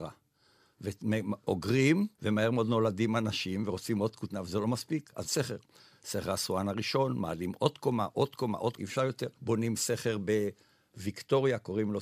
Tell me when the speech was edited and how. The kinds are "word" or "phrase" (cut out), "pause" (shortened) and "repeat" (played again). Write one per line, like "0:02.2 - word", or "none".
0:02.1 - pause
0:05.2 - phrase
0:08.8 - word
0:09.3 - pause